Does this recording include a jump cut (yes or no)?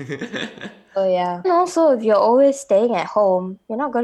yes